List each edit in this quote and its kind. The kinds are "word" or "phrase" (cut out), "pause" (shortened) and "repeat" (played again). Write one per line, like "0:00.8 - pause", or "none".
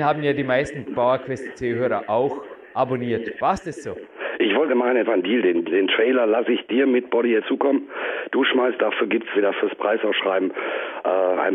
0:04.7 - phrase
0:05.1 - word
0:05.6 - word
0:07.4 - phrase
0:08.8 - phrase
0:09.3 - word